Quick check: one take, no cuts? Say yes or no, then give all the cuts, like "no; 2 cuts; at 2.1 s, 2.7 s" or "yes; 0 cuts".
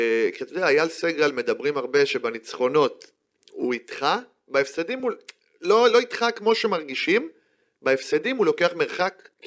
yes; 0 cuts